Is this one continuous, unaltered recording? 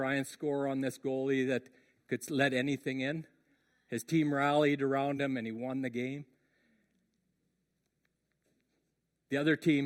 yes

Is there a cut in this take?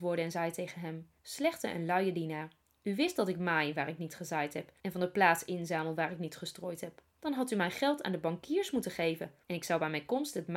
yes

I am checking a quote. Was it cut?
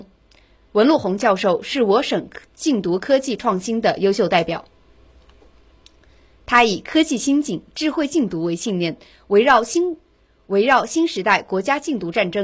no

